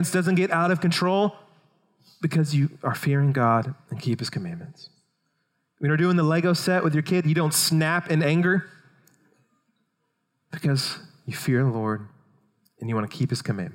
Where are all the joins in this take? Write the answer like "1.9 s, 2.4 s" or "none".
none